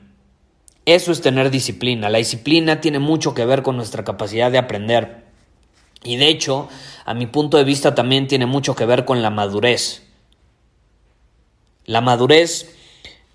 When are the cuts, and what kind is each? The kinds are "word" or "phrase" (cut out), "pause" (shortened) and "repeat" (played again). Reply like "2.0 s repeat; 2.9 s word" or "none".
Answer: none